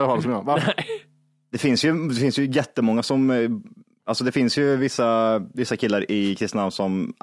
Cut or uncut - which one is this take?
uncut